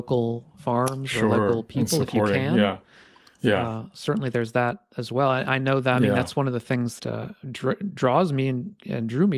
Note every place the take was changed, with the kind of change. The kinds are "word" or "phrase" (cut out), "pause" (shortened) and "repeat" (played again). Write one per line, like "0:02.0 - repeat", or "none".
0:07.0 - word